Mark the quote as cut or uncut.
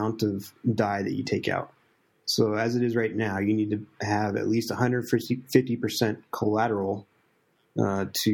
uncut